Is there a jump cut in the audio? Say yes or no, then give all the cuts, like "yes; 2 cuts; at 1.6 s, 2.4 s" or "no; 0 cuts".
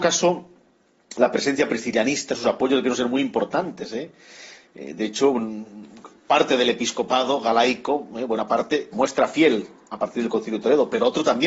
yes; 1 cut; at 8.9 s